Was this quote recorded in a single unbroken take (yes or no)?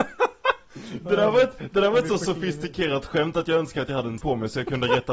no